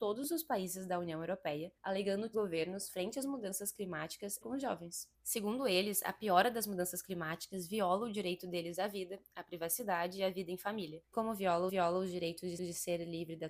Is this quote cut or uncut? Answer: cut